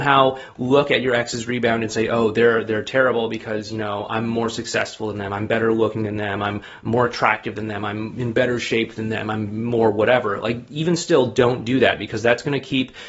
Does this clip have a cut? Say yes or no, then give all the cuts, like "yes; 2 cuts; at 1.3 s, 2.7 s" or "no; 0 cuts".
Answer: no; 0 cuts